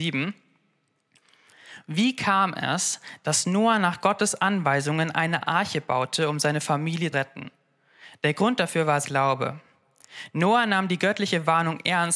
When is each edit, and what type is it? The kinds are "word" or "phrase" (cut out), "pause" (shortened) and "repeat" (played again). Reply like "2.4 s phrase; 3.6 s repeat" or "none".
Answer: 7.1 s word; 9.0 s word